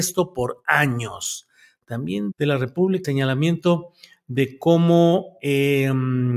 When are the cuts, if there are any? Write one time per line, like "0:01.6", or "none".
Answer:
0:02.3
0:03.0